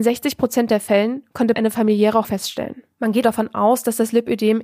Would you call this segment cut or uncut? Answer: cut